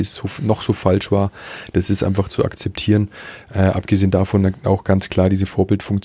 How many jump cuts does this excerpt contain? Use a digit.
0